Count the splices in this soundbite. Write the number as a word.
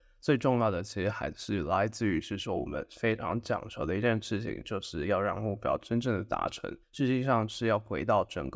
one